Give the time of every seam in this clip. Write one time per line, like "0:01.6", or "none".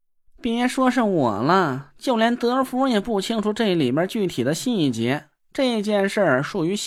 0:05.4